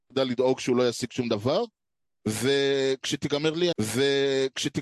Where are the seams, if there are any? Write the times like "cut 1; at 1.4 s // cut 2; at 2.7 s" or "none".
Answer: cut 1; at 3.7 s